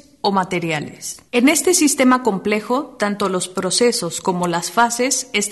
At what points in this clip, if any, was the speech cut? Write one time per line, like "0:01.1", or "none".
0:01.3